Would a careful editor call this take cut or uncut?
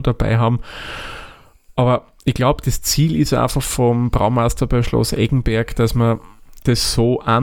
uncut